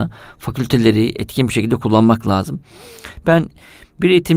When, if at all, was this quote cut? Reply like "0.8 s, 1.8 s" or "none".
none